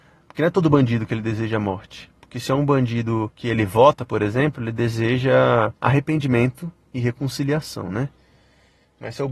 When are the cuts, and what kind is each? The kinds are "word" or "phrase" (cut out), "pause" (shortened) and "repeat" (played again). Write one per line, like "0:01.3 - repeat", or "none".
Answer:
0:03.3 - pause
0:05.8 - pause